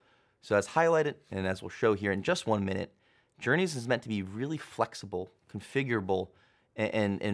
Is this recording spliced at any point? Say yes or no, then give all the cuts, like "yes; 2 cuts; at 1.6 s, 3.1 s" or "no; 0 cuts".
no; 0 cuts